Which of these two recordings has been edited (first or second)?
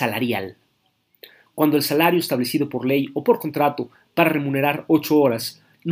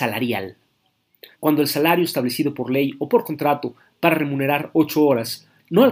second